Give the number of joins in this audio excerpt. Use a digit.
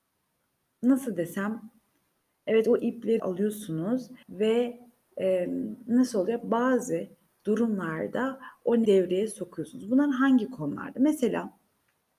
3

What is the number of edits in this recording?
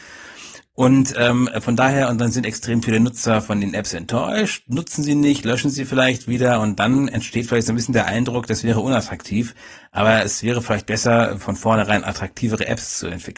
0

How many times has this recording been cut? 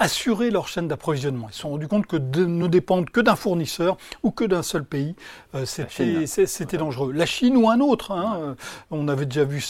0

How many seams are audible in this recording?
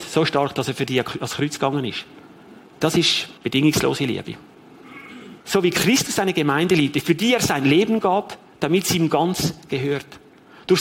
3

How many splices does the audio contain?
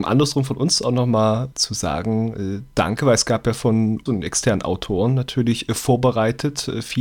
2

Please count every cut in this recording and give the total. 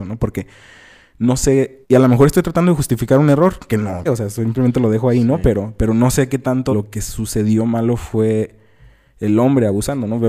4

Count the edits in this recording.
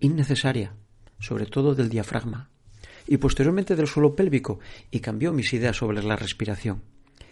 0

